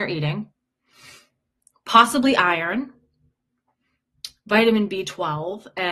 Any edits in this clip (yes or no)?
no